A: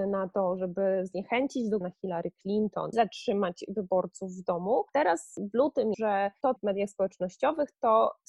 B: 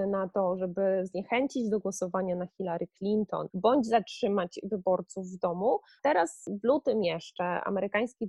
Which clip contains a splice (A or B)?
A